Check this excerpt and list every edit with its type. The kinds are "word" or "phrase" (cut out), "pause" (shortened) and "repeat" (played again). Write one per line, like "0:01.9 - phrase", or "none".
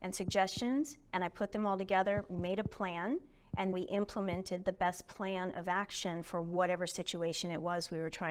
0:03.7 - word